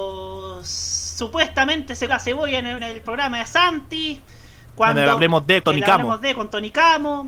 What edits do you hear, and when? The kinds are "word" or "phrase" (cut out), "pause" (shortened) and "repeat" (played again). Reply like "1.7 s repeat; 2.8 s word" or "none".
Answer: 2.1 s word; 2.8 s word; 5.6 s word